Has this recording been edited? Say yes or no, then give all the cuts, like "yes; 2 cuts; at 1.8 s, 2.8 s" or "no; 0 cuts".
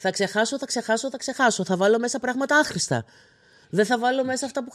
no; 0 cuts